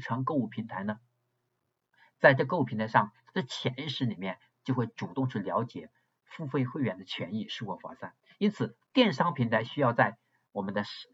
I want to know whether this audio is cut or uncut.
uncut